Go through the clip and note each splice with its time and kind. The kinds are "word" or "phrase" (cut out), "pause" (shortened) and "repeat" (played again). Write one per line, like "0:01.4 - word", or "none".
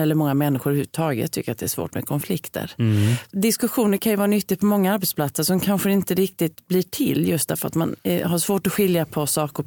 none